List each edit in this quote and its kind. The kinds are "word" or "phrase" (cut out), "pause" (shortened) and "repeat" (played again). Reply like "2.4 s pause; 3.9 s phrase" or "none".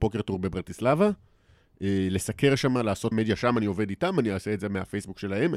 3.1 s word